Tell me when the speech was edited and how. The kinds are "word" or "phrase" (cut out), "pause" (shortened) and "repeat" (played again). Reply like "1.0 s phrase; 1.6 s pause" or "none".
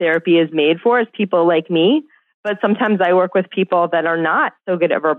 none